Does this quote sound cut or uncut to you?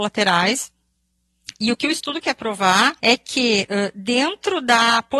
cut